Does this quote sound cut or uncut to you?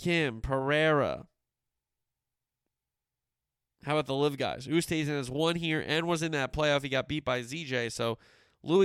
uncut